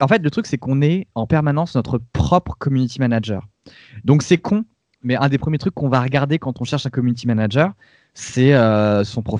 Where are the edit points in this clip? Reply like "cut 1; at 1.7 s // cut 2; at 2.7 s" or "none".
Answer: none